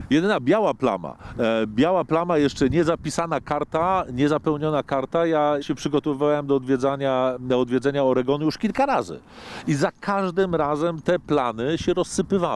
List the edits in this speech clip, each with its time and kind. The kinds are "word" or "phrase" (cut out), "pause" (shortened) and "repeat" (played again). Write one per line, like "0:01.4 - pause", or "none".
0:05.6 - word